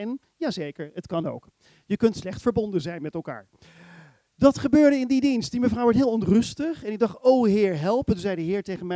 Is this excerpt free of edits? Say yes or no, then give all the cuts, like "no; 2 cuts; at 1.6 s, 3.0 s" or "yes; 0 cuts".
yes; 0 cuts